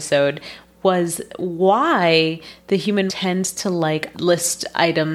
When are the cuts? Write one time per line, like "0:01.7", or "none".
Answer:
0:03.1
0:04.1